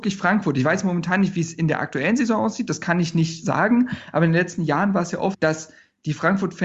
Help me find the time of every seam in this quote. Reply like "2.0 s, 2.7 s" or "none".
5.3 s